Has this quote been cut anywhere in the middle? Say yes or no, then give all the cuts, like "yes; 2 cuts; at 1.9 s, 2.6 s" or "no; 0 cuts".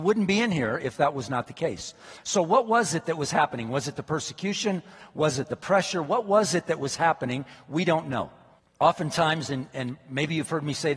yes; 1 cut; at 8.6 s